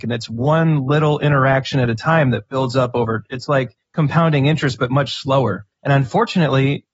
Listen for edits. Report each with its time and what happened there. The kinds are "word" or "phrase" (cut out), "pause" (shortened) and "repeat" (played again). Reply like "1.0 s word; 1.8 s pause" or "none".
3.8 s pause; 5.7 s pause